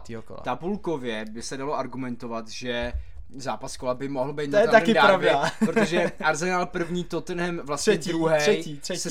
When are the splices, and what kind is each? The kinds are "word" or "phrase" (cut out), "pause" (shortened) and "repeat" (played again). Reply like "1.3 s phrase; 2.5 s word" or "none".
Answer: none